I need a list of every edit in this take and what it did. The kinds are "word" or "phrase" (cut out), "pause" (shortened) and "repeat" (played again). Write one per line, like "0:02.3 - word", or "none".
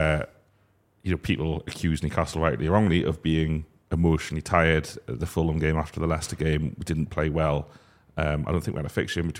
none